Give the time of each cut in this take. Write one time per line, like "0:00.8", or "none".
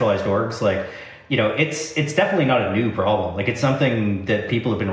none